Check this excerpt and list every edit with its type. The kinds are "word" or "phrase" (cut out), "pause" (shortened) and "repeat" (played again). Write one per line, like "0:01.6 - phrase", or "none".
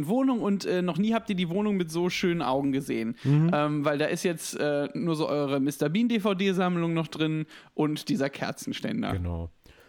none